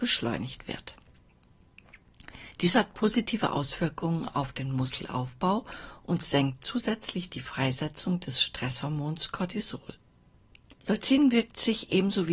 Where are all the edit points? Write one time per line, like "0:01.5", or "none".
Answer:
0:10.8